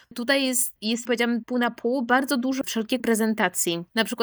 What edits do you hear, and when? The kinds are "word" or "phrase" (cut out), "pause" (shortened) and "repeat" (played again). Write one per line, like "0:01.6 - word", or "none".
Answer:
0:01.1 - word
0:01.4 - word
0:02.6 - word
0:03.0 - word